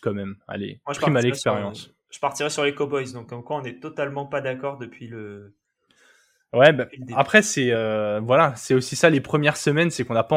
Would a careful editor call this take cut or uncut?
uncut